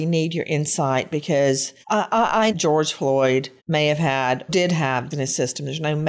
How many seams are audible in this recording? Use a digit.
5